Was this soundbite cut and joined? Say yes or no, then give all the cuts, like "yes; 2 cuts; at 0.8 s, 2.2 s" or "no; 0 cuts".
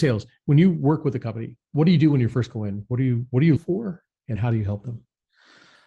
yes; 2 cuts; at 3.6 s, 4.4 s